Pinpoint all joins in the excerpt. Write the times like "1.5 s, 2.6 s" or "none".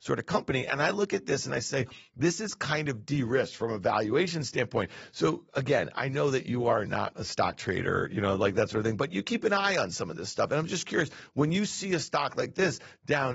none